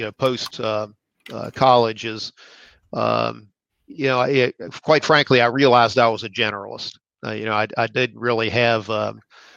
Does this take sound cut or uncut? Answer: cut